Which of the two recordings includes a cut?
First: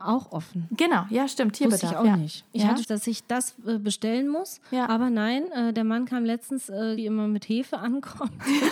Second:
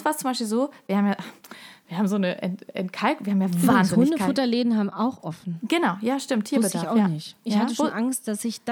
first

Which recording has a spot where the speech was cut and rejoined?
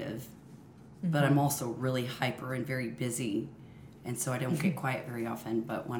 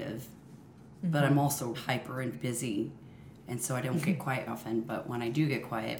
second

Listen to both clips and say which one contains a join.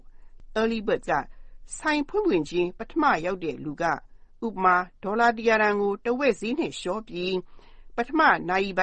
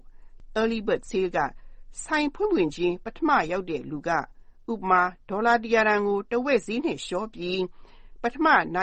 first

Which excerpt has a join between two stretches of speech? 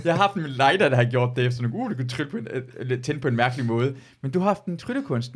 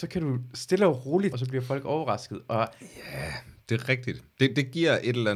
second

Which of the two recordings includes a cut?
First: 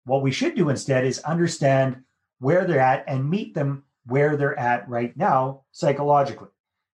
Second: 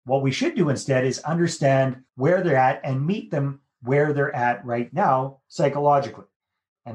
second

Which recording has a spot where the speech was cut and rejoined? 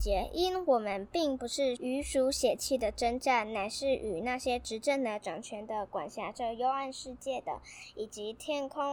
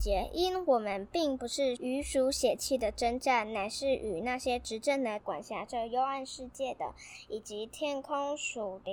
second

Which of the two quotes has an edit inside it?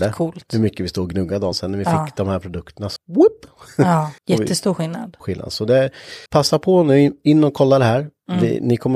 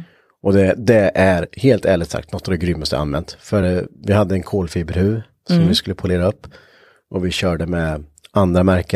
first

